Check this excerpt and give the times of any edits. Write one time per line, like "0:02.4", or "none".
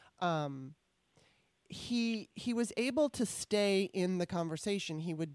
none